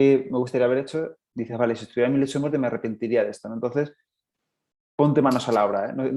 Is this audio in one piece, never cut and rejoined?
yes; 0 cuts

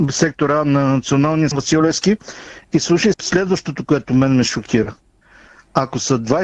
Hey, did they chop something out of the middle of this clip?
yes; 2 cuts; at 1.5 s, 3.1 s

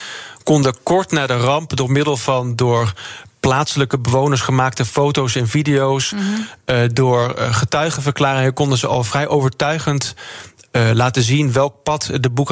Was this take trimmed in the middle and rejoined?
no; 0 cuts

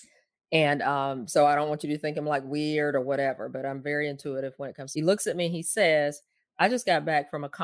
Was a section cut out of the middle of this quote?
yes; 1 cut; at 5.0 s

